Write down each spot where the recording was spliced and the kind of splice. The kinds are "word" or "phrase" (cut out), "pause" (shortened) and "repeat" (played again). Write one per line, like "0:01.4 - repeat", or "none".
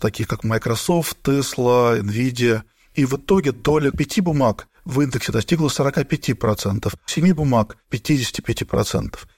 0:03.9 - word
0:07.1 - phrase